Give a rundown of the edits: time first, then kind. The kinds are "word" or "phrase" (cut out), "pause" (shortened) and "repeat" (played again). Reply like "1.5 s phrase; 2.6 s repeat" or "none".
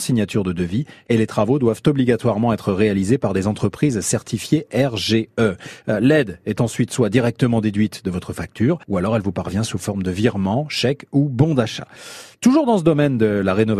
8.8 s pause